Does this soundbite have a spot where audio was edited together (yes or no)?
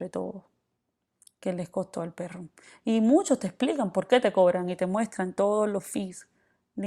no